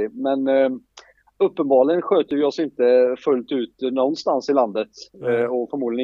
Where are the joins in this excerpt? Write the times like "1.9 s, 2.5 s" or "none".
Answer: none

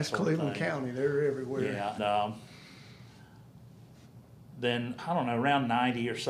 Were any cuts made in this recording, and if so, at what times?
2.0 s, 5.0 s

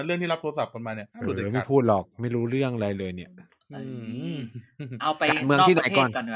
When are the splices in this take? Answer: 1.1 s

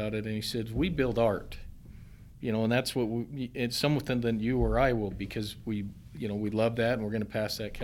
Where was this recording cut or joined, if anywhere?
5.1 s

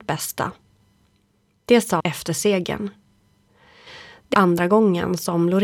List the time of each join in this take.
2.0 s, 4.3 s

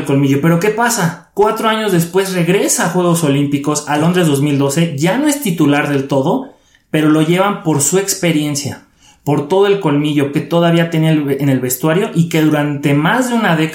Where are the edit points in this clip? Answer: 10.3 s

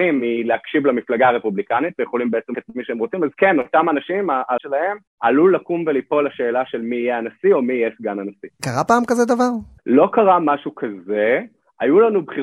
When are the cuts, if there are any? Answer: 2.5 s, 4.6 s, 5.1 s

